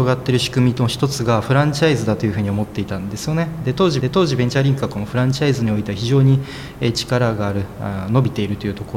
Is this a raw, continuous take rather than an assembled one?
no; 1 cut; at 4.0 s

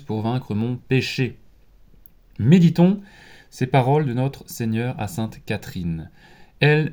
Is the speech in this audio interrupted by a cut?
no; 0 cuts

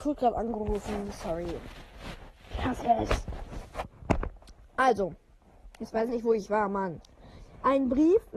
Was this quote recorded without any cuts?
no; 1 cut; at 6.1 s

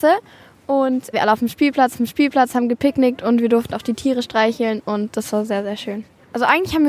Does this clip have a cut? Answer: yes; 3 cuts; at 1.1 s, 1.9 s, 3.7 s

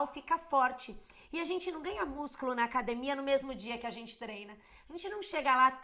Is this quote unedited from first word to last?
yes; 0 cuts

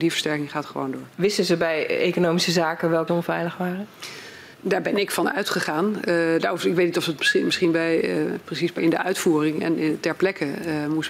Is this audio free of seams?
no; 4 cuts; at 1.1 s, 3.1 s, 4.5 s, 8.8 s

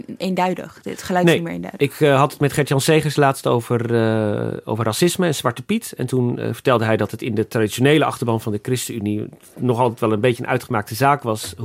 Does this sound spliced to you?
no; 0 cuts

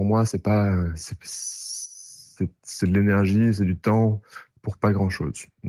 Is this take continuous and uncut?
no; 1 cut; at 4.5 s

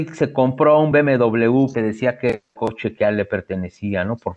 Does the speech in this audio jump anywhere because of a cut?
yes; 1 cut; at 1.7 s

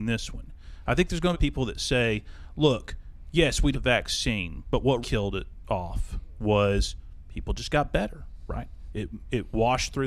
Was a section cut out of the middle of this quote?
yes; 3 cuts; at 1.3 s, 3.7 s, 5.0 s

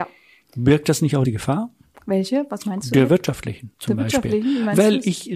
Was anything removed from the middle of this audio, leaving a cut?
yes; 2 cuts; at 1.2 s, 3.7 s

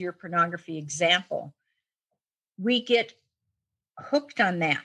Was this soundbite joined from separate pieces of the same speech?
no; 0 cuts

